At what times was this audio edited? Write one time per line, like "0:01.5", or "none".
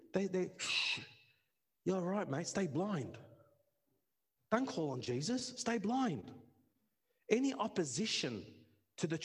none